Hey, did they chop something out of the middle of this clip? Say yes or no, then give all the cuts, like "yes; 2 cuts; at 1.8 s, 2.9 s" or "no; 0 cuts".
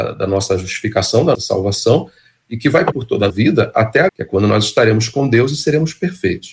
yes; 4 cuts; at 1.3 s, 2.9 s, 3.3 s, 4.1 s